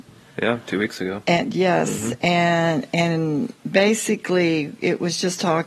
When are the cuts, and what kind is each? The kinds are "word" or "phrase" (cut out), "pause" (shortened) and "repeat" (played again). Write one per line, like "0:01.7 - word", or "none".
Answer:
0:03.6 - pause